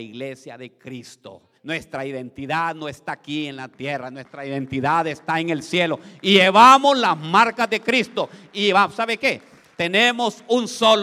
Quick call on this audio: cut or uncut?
cut